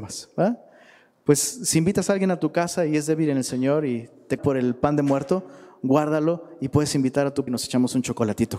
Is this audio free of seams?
no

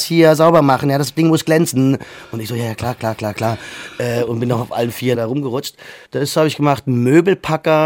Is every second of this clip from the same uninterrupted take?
no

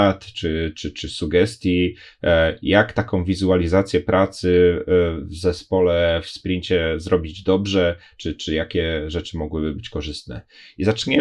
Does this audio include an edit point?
no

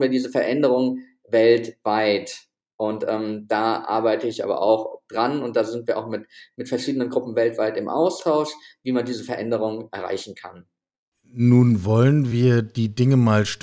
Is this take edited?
no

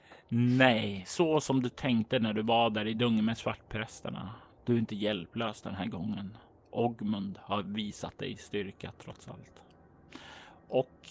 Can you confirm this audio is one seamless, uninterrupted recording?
yes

